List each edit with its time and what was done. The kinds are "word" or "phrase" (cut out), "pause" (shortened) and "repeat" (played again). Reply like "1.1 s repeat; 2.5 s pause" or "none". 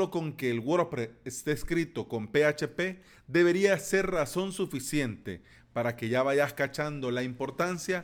none